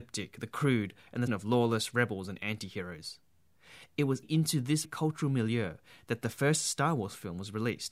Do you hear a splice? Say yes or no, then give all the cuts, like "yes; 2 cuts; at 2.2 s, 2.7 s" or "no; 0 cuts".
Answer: yes; 3 cuts; at 1.3 s, 4.2 s, 4.8 s